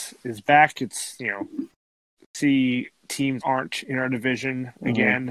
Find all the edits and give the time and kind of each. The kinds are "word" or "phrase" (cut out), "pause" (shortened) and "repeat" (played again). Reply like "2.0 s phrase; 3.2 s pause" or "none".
2.2 s phrase; 3.4 s word